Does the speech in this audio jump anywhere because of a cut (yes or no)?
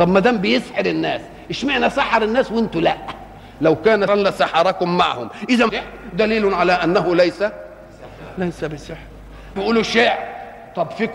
yes